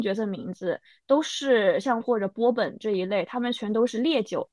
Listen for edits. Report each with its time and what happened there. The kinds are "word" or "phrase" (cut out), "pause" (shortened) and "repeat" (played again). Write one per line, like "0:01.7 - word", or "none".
0:02.0 - word